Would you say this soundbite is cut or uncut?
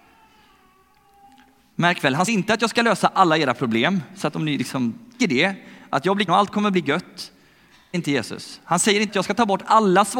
cut